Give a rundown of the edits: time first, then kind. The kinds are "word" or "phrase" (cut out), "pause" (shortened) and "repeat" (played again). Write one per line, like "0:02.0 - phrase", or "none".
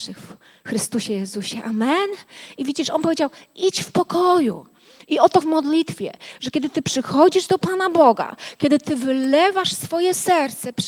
0:05.4 - word